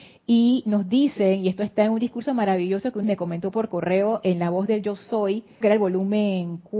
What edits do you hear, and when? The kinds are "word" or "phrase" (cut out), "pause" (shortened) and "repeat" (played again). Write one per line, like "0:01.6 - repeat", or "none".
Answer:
0:03.0 - phrase
0:05.6 - word